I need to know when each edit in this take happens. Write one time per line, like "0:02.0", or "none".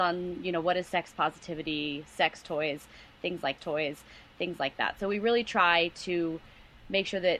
0:03.6

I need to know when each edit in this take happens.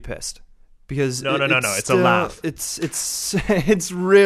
none

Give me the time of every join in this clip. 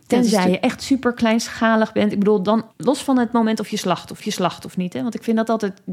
0:02.7
0:04.2

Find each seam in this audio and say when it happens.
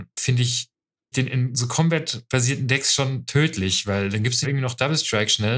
0:01.1
0:04.4

